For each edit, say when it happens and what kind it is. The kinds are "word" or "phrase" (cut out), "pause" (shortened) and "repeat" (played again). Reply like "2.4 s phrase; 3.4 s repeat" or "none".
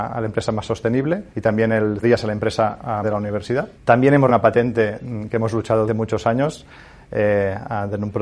1.3 s pause; 2.0 s word; 3.0 s phrase; 3.7 s pause; 4.3 s word; 5.9 s word